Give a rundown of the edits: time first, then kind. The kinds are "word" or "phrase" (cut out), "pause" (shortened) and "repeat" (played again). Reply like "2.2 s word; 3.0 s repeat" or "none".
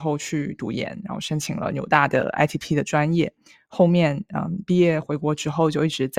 none